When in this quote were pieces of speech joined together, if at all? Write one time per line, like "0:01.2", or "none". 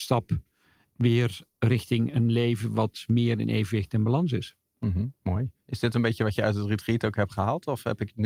0:05.2